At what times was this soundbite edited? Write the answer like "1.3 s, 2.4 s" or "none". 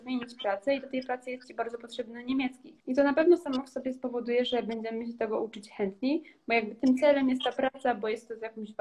2.8 s

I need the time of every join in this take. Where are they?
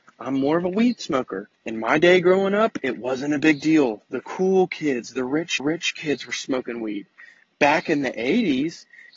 1.5 s, 5.6 s

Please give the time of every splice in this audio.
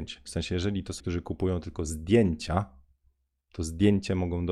1.0 s

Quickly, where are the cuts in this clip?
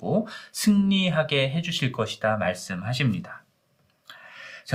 none

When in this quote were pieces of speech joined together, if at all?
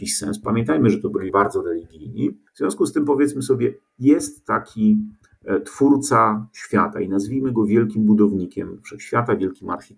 1.3 s, 2.5 s

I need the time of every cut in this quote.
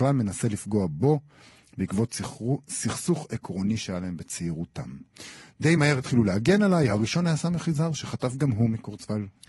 none

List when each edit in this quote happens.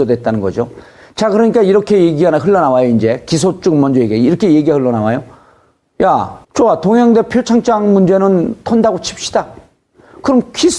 6.4 s

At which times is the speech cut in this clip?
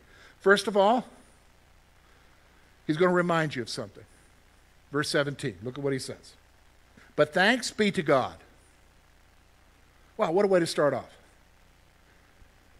7.0 s

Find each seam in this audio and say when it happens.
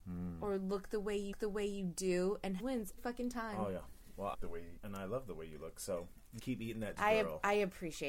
1.3 s, 2.6 s, 3.0 s, 4.3 s, 4.8 s, 6.4 s, 7.0 s

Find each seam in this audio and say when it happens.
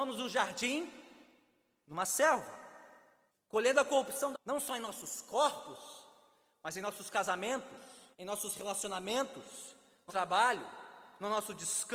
3.3 s, 4.3 s, 8.1 s, 10.1 s

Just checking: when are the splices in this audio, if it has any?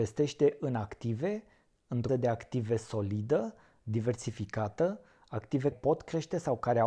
2.1 s, 5.7 s

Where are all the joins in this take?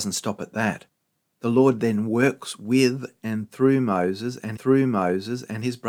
4.6 s

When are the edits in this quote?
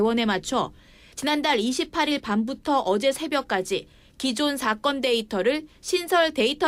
none

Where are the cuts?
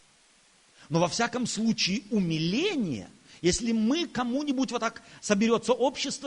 none

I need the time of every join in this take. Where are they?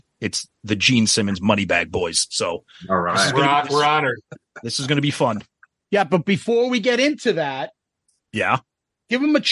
none

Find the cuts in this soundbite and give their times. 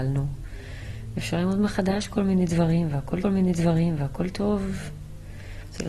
3.2 s

